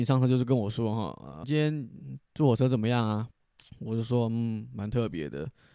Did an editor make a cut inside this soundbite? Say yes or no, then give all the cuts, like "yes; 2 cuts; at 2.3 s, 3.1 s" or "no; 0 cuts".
yes; 2 cuts; at 1.4 s, 3.3 s